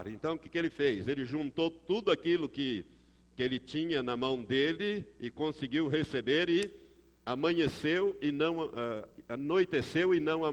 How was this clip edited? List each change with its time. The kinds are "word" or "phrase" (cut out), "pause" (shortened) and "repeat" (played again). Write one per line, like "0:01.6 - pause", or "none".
none